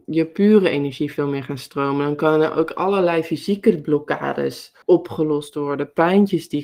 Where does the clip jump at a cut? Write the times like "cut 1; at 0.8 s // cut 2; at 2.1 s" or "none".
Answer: cut 1; at 4.8 s